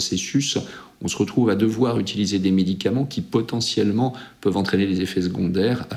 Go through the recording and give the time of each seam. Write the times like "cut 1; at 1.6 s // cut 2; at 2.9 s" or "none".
none